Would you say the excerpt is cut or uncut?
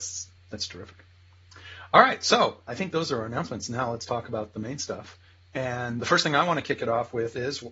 cut